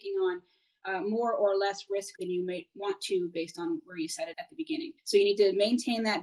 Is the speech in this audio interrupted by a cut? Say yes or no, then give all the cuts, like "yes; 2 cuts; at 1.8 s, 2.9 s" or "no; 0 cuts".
yes; 3 cuts; at 2.2 s, 4.3 s, 5.0 s